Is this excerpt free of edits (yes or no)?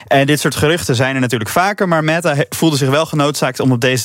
yes